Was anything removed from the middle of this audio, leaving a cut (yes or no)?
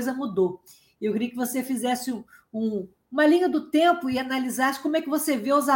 no